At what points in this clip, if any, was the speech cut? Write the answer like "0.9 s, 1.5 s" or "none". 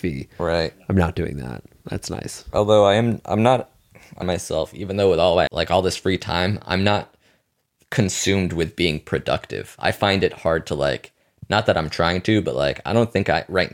4.2 s, 5.5 s

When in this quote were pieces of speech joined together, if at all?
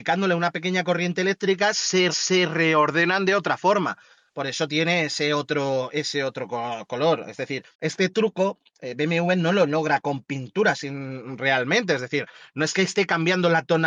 2.1 s, 7.7 s

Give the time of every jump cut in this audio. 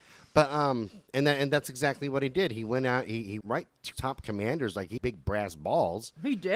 3.4 s, 3.9 s, 5.0 s

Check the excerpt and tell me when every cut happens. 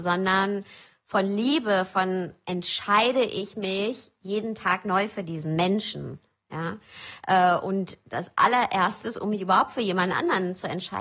none

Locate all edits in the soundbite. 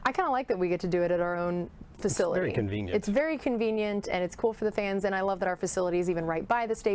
none

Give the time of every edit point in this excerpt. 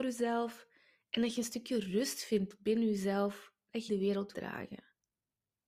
3.9 s, 4.3 s

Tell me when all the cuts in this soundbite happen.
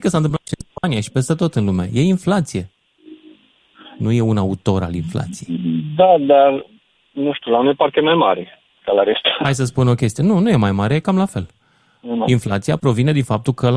none

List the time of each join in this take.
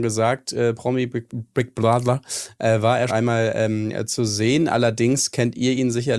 1.3 s, 3.1 s

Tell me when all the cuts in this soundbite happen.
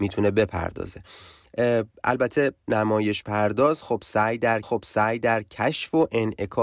2.7 s, 4.6 s

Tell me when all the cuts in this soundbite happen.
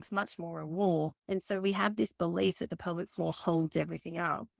1.2 s

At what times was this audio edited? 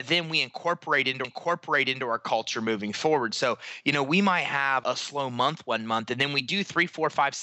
1.2 s, 4.8 s

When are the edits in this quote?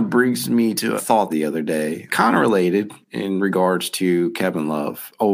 1.0 s, 1.3 s, 2.1 s, 3.0 s

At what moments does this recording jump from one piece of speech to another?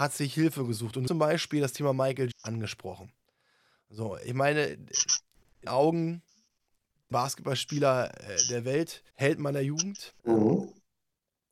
1.1 s, 2.3 s, 5.7 s, 7.1 s, 9.1 s, 10.2 s

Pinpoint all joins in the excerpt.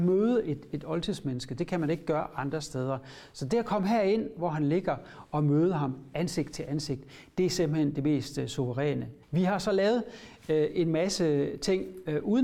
9.2 s

